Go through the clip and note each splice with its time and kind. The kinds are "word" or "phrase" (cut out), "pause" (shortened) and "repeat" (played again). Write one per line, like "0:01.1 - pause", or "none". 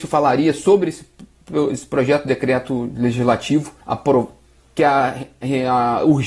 0:03.8 - pause